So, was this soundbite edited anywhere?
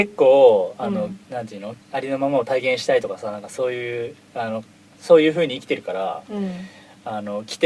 yes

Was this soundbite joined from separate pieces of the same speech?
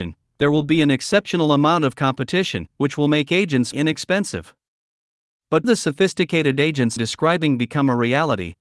yes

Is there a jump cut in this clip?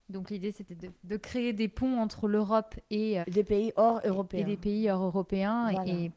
yes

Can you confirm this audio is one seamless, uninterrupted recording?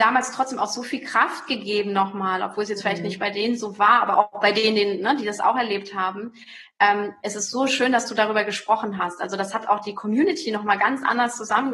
no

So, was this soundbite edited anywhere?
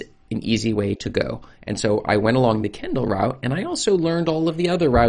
no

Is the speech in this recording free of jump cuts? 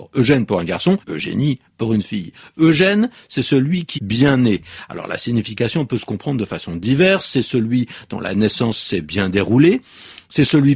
no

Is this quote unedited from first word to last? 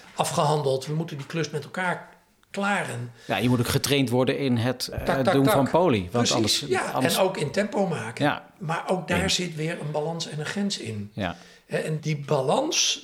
no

